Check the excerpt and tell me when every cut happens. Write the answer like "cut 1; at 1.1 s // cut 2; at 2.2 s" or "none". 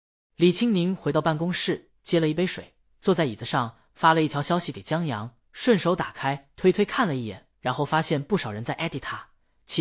cut 1; at 7.5 s